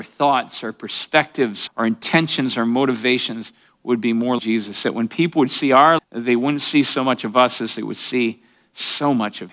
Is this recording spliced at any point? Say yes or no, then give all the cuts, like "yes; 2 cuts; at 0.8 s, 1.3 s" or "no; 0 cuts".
yes; 3 cuts; at 1.7 s, 4.4 s, 6.0 s